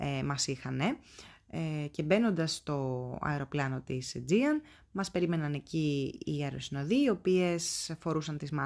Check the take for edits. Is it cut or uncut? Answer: uncut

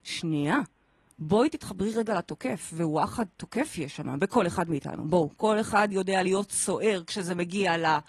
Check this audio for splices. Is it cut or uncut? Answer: uncut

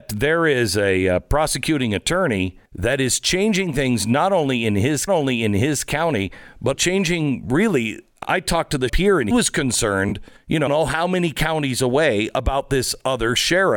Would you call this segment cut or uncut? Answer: cut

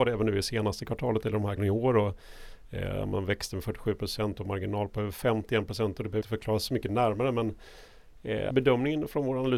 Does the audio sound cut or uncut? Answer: cut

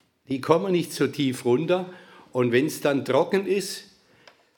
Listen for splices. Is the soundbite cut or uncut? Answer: uncut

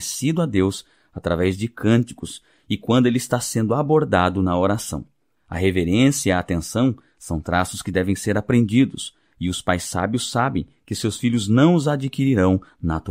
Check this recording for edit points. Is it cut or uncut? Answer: uncut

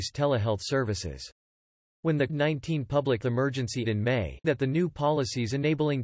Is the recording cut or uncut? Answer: cut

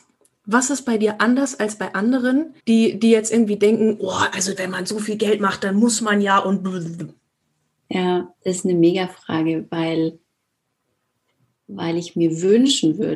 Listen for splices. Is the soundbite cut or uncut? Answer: cut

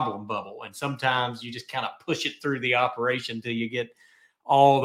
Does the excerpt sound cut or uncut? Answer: uncut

